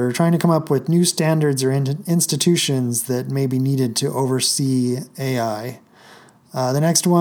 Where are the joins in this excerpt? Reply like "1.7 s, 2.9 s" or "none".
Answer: none